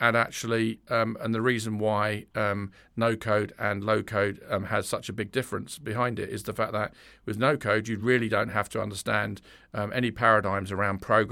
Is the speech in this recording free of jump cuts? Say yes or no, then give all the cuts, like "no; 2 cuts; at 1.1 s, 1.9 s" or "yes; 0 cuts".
yes; 0 cuts